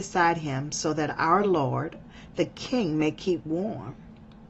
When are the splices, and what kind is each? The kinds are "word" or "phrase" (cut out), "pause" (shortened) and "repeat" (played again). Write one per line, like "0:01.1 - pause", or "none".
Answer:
none